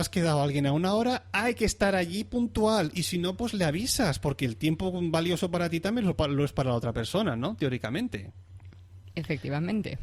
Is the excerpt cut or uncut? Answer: uncut